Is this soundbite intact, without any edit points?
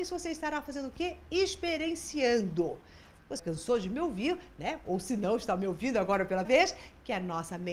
no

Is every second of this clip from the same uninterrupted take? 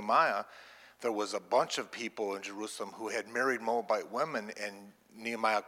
yes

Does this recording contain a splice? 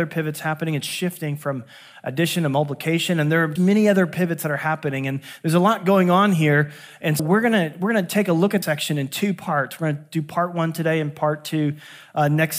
yes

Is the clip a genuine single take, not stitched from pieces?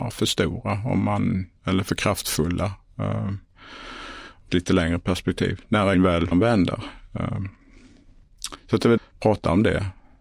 no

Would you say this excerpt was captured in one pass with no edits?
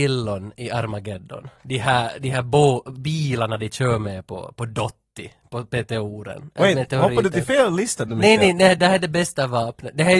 yes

